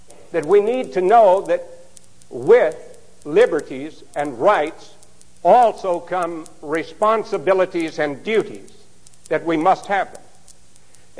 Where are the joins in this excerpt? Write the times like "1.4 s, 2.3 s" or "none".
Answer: none